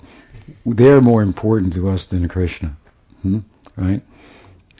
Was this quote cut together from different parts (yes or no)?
no